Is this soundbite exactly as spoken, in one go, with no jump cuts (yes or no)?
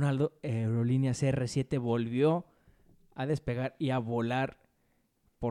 yes